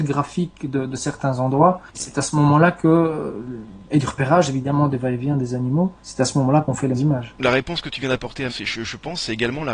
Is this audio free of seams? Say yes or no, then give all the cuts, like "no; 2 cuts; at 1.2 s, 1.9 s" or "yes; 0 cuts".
no; 3 cuts; at 6.0 s, 6.9 s, 8.5 s